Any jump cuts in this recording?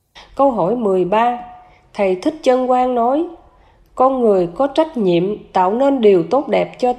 no; 0 cuts

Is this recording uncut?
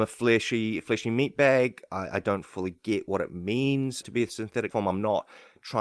no; 2 cuts; at 4.0 s, 4.7 s

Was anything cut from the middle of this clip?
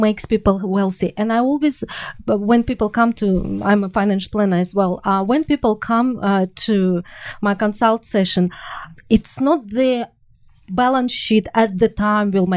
no; 0 cuts

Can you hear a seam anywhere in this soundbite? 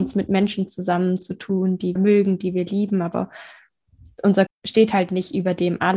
yes; 2 cuts; at 2.0 s, 4.5 s

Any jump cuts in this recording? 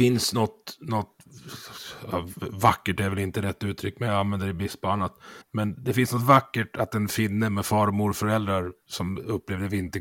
yes; 1 cut; at 5.4 s

